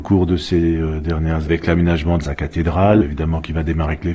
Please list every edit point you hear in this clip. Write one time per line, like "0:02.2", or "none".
0:01.4
0:02.2

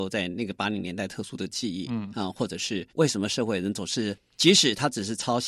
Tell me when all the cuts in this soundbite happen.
0:02.9

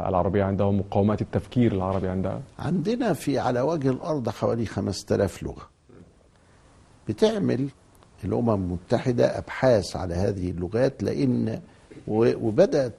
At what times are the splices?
none

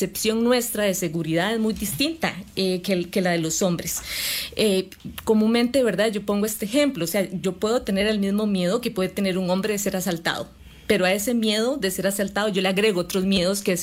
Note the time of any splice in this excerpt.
none

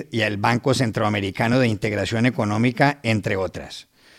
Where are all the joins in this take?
none

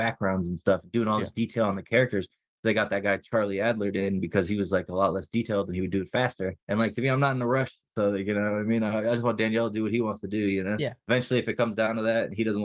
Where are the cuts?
0:06.6

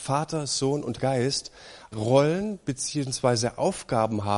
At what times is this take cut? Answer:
0:01.0
0:01.9

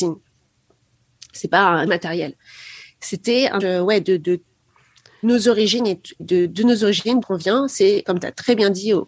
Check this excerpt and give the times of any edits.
0:01.9
0:03.6
0:05.2
0:06.2
0:07.2

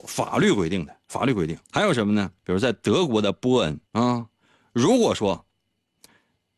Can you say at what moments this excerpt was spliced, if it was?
0:01.6
0:02.4
0:03.9

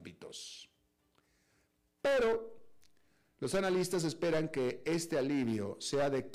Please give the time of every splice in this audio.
none

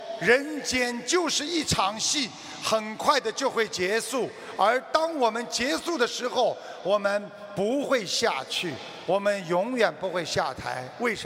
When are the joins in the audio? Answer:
none

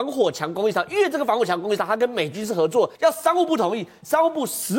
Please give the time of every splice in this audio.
0:02.9

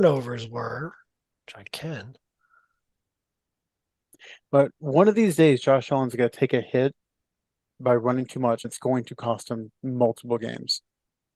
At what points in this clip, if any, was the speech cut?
0:08.6

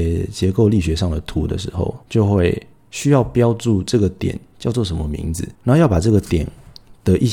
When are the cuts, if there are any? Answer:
0:02.0
0:02.7
0:05.5

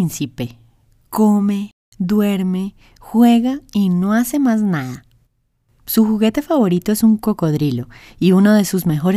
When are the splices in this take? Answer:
none

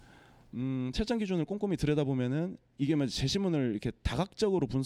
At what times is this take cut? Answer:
none

